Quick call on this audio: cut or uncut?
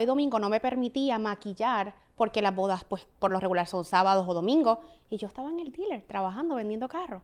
uncut